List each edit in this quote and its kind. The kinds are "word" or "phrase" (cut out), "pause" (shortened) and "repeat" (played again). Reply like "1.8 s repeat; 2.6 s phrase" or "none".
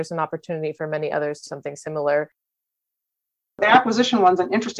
1.5 s word